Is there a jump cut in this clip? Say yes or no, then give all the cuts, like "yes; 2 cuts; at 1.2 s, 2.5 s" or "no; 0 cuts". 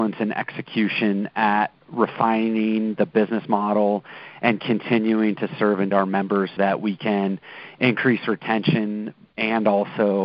yes; 2 cuts; at 5.9 s, 6.6 s